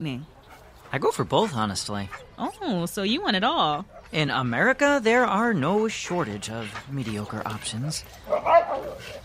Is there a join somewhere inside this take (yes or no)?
no